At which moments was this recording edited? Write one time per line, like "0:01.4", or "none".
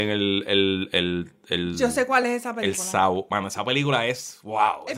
none